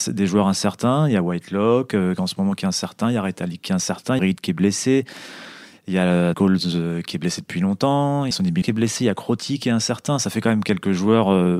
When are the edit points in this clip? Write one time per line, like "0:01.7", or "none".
0:04.2
0:06.3
0:08.3
0:08.6